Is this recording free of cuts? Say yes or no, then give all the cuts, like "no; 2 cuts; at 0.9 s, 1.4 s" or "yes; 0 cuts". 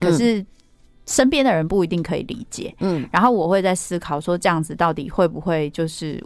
yes; 0 cuts